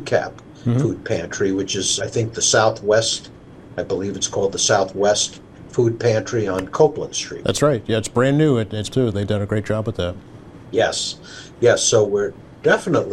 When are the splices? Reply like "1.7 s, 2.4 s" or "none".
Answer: 2.0 s, 8.9 s, 12.0 s